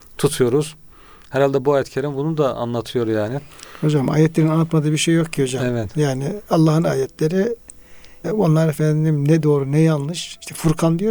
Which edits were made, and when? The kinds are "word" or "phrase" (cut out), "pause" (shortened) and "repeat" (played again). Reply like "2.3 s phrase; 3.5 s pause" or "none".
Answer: 8.2 s word